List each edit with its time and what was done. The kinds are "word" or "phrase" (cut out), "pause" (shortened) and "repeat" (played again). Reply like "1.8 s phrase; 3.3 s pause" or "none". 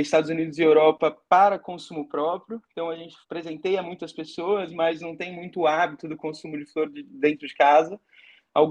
1.3 s pause; 3.2 s pause